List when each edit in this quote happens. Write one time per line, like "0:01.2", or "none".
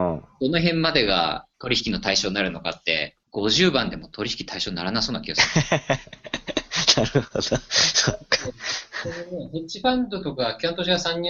0:01.5
0:03.2